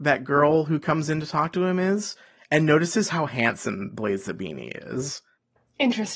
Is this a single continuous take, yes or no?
yes